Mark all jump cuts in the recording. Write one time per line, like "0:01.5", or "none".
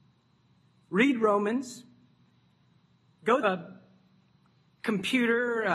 0:03.4

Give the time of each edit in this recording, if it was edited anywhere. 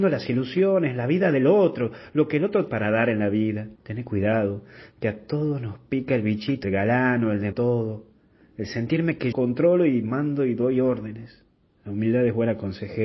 0:02.7
0:03.8
0:06.6
0:07.5
0:09.3
0:11.6

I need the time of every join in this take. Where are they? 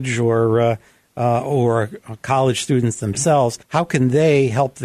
0:03.6

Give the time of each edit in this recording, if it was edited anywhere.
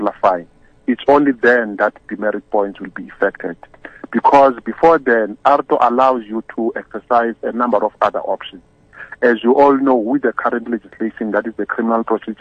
none

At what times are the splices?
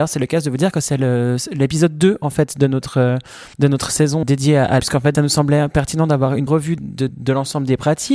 0:03.5
0:04.2
0:04.8
0:05.1
0:06.5
0:06.8
0:07.1

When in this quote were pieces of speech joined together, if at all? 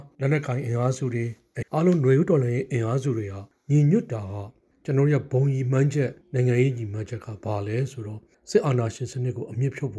0:01.6

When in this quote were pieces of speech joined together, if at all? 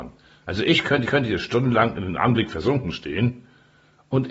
0:01.1

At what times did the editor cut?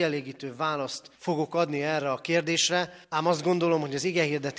0:01.1
0:03.0

